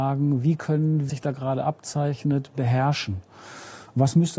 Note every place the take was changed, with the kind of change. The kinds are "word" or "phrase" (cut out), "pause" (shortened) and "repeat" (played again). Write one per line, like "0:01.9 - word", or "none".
0:01.1 - phrase